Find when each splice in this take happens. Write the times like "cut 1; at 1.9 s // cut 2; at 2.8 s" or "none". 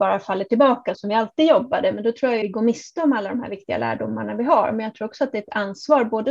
cut 1; at 0.9 s // cut 2; at 2.4 s